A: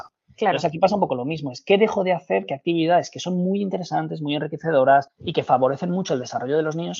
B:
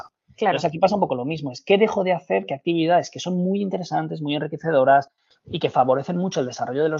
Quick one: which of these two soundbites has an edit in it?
A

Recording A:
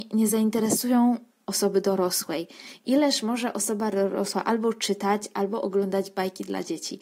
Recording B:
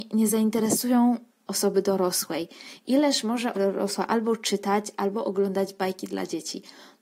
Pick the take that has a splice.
B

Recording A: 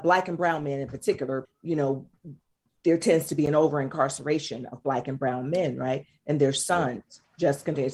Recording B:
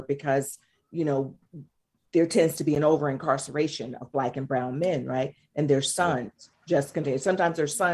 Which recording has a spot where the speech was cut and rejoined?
A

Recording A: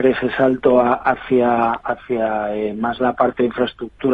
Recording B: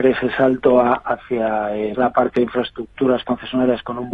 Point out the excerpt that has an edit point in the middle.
B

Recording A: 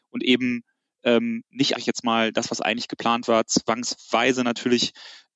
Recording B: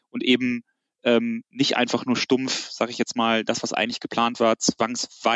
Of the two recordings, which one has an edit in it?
A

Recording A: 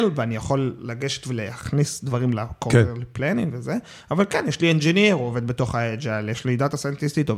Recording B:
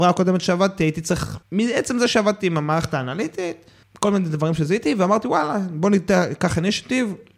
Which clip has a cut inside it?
B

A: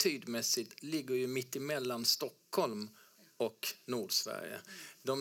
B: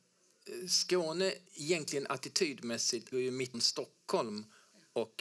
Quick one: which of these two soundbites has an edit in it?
B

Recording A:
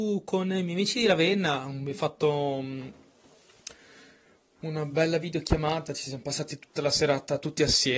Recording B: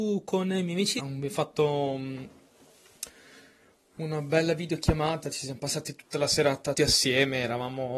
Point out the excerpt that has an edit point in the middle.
B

